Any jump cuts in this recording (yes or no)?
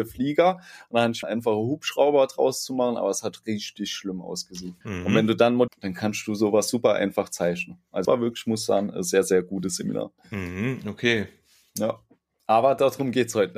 yes